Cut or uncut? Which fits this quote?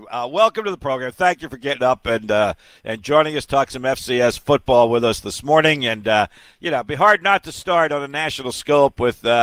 uncut